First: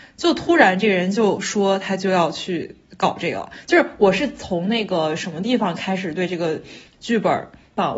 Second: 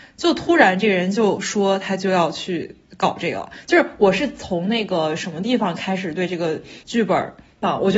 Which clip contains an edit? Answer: second; 1 cut; at 6.8 s

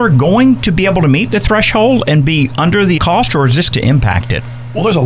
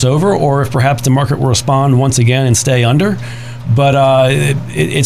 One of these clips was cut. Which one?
first; 2 cuts; at 3.0 s, 3.7 s

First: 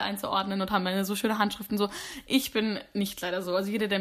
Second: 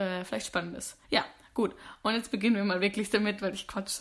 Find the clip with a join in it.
second; 1 cut; at 1.0 s

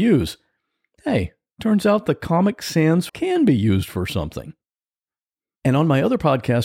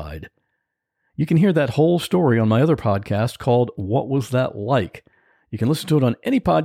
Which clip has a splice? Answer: first; 1 cut; at 3.1 s

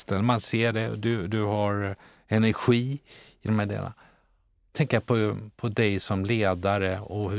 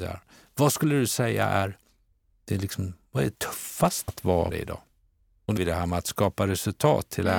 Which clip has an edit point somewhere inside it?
second; 4 cuts; at 3.3 s, 4.1 s, 4.5 s, 5.6 s

